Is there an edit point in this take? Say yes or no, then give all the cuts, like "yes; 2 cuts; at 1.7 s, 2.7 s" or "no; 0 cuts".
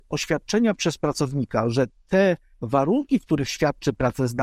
no; 0 cuts